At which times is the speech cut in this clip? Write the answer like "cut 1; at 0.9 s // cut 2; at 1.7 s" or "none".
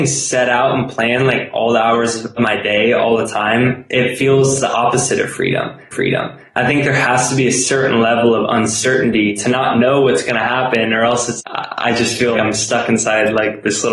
cut 1; at 2.4 s // cut 2; at 5.9 s // cut 3; at 11.4 s // cut 4; at 12.3 s